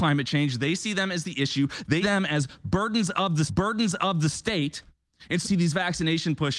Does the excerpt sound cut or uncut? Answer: cut